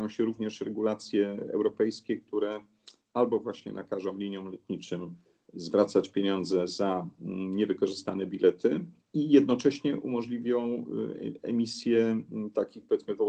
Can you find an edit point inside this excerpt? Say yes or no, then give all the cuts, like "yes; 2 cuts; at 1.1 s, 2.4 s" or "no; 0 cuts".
no; 0 cuts